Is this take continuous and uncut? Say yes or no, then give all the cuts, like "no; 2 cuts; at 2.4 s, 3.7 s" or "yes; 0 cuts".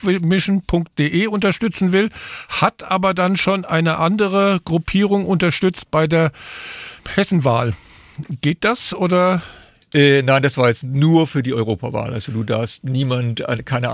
yes; 0 cuts